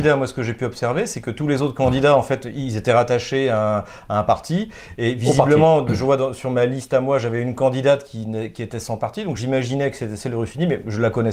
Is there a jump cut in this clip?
no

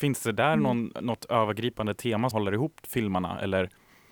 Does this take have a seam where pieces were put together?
yes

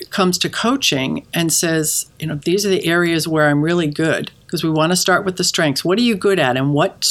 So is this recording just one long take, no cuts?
no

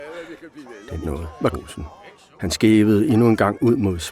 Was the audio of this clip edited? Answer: yes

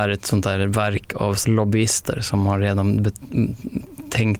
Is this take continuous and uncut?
no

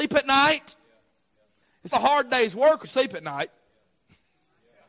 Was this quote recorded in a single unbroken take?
no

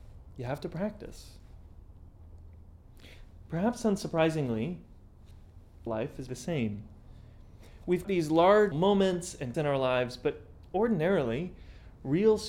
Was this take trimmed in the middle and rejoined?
yes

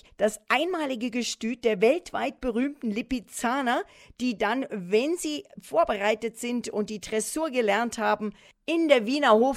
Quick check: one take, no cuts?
yes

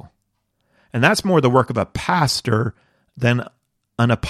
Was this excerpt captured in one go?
yes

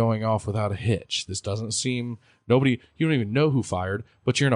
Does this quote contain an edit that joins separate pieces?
no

